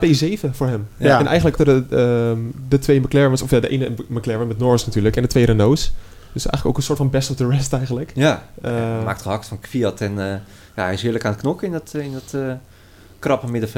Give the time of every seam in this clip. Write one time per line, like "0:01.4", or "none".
0:01.6